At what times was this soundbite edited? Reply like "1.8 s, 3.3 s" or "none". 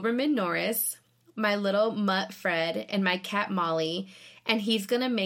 none